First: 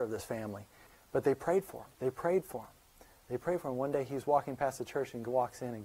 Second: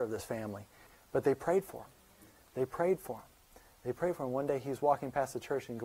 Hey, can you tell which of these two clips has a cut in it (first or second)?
first